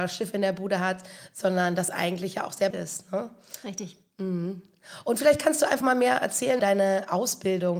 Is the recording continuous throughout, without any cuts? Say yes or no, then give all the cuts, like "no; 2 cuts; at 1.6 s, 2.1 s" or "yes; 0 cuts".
no; 4 cuts; at 1.9 s, 2.7 s, 5.8 s, 6.6 s